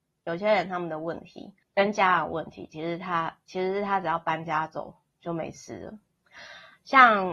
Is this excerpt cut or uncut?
cut